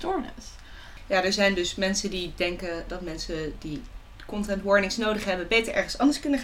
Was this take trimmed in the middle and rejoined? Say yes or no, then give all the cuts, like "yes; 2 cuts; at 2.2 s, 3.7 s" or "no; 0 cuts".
yes; 1 cut; at 2.9 s